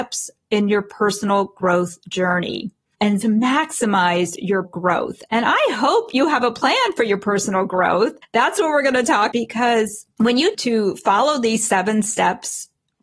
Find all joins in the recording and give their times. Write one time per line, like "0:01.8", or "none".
0:03.2
0:04.6
0:09.3
0:10.1
0:10.5